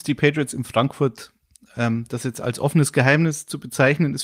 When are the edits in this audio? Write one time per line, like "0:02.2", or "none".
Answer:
none